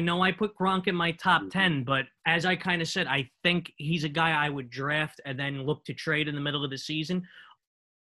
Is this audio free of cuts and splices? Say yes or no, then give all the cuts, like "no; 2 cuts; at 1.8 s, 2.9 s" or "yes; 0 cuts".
no; 1 cut; at 2.2 s